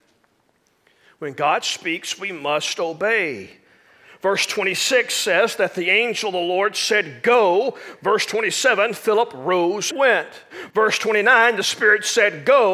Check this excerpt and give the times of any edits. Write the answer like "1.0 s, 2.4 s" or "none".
9.9 s